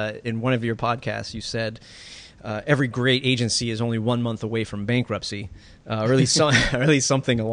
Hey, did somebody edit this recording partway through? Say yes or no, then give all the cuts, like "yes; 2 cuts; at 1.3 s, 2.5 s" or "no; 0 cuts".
no; 0 cuts